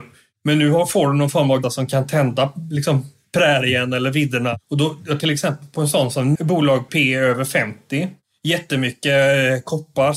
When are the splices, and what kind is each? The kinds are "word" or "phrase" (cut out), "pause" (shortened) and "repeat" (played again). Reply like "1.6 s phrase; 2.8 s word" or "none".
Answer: 1.6 s word; 5.2 s word; 6.4 s word; 6.9 s word